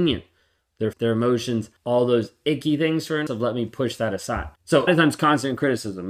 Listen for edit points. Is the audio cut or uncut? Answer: cut